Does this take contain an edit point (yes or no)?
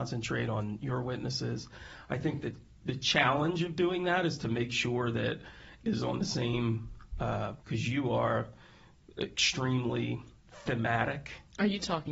yes